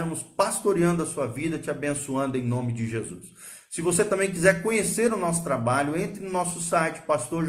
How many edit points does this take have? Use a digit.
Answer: 0